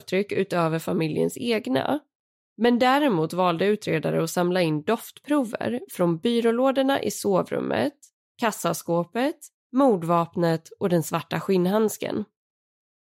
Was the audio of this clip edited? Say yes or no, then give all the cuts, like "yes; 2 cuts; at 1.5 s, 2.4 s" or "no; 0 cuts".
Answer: no; 0 cuts